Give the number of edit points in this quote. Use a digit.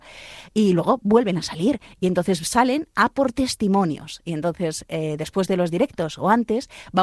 0